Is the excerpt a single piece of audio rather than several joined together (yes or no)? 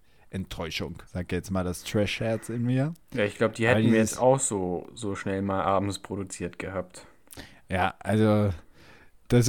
no